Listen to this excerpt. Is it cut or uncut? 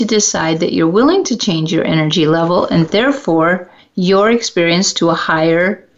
cut